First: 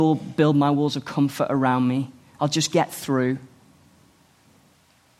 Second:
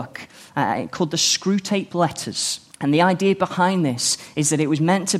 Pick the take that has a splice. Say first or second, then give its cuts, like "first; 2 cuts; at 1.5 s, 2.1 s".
second; 1 cut; at 2.7 s